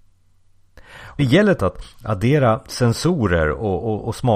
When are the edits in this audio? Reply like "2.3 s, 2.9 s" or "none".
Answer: 1.2 s, 1.6 s